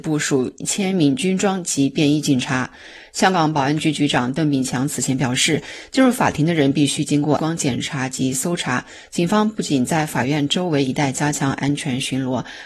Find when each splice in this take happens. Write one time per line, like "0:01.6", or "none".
0:07.4